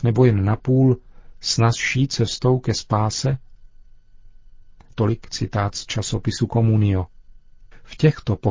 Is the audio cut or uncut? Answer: uncut